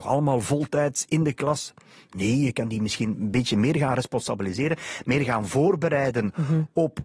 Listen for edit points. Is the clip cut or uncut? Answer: uncut